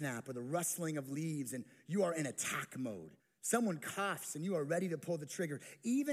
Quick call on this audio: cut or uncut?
cut